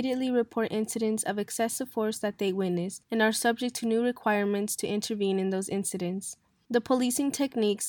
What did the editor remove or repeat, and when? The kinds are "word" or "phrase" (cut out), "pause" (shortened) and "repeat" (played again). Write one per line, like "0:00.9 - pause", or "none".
none